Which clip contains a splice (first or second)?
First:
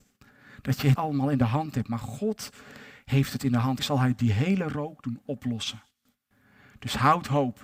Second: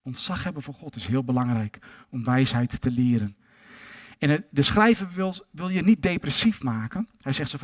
first